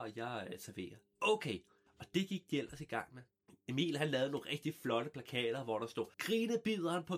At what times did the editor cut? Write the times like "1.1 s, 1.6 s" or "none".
1.9 s, 3.5 s, 6.1 s